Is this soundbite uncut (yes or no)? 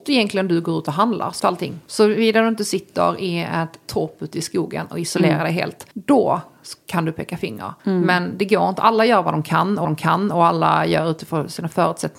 no